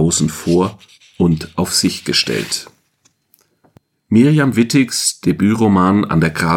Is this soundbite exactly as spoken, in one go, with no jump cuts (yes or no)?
yes